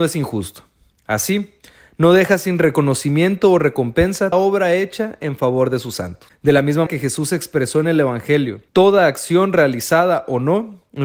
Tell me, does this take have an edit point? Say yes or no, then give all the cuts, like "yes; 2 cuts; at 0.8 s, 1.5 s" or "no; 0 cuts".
yes; 3 cuts; at 4.3 s, 6.9 s, 8.7 s